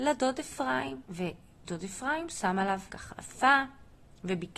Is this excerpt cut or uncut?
cut